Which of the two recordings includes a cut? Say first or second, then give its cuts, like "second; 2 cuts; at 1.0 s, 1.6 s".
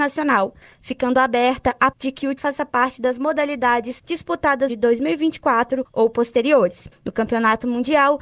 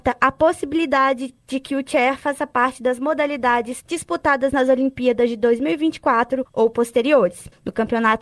first; 3 cuts; at 1.9 s, 2.4 s, 4.7 s